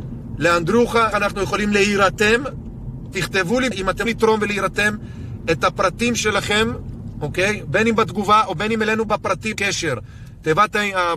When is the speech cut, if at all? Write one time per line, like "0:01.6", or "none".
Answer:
0:01.1
0:03.7
0:04.1
0:09.6